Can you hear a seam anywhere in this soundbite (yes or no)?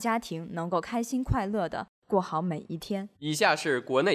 yes